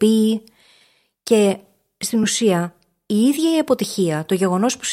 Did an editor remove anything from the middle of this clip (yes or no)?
no